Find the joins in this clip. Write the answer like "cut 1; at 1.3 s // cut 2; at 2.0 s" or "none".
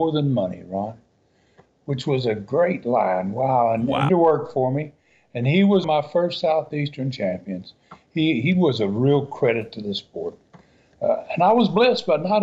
cut 1; at 4.1 s // cut 2; at 5.8 s